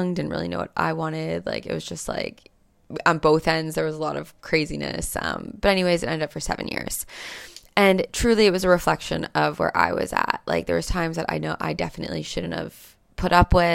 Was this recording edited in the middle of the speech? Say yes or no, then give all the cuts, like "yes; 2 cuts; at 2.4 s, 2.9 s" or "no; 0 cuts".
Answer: no; 0 cuts